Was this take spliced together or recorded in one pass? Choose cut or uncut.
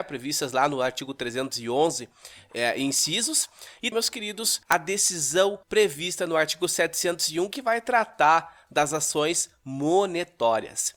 cut